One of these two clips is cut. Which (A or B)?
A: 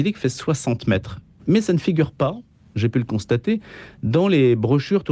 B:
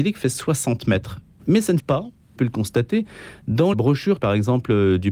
B